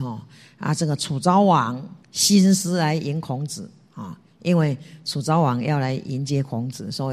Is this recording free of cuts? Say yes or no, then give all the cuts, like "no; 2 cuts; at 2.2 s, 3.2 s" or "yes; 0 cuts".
no; 1 cut; at 2.0 s